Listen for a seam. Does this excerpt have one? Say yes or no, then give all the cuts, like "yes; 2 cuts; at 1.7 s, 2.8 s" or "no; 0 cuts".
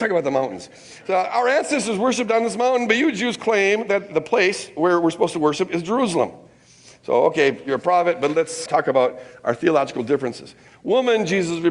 yes; 2 cuts; at 4.1 s, 8.7 s